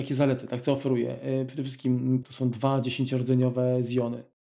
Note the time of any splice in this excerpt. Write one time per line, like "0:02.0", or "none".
0:02.2